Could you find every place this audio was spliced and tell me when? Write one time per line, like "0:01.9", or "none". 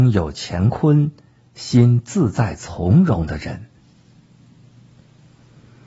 none